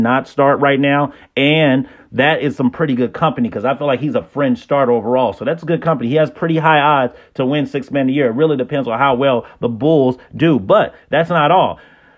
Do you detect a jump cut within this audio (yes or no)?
no